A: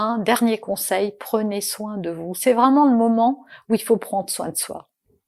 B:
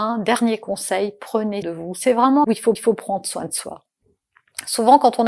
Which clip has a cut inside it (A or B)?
B